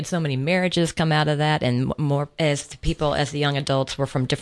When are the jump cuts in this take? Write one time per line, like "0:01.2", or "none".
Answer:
none